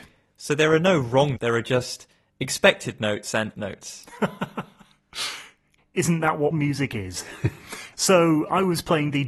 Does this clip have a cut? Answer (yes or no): yes